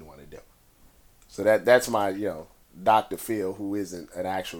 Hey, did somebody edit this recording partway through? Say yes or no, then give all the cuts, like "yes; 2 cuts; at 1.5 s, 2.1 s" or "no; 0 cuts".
no; 0 cuts